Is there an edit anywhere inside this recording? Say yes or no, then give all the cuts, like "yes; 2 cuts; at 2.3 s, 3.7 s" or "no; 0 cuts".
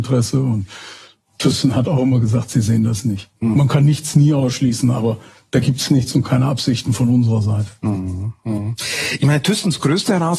no; 0 cuts